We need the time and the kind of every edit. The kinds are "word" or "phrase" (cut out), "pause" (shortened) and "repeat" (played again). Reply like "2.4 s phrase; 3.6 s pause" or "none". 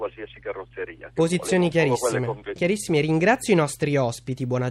2.6 s word